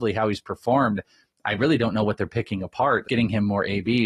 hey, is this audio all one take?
no; 1 cut; at 3.1 s

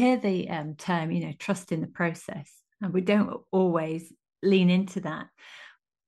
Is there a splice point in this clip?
no; 0 cuts

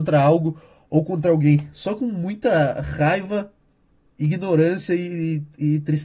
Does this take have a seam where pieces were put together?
no; 0 cuts

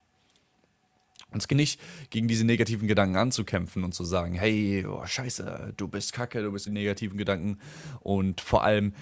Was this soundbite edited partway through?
yes; 2 cuts; at 1.5 s, 6.7 s

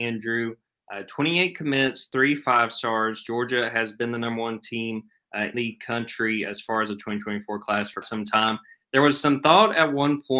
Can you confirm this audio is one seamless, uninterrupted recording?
no; 2 cuts; at 5.5 s, 8.0 s

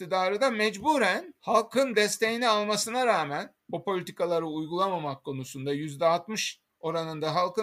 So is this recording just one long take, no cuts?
yes; 0 cuts

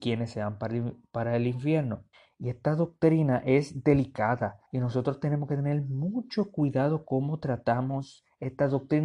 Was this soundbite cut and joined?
yes; 2 cuts; at 2.1 s, 4.6 s

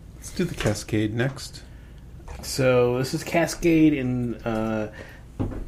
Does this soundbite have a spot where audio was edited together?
yes; 1 cut; at 2.4 s

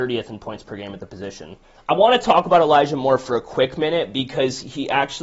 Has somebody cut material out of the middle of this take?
no; 0 cuts

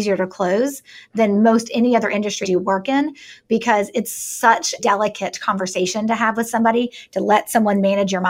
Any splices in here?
yes; 2 cuts; at 2.4 s, 4.8 s

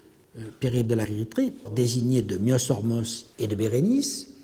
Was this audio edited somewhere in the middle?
yes; 3 cuts; at 1.0 s, 1.6 s, 3.3 s

